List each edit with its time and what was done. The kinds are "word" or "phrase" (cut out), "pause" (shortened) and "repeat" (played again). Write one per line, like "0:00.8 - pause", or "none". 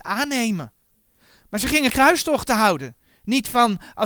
0:01.9 - word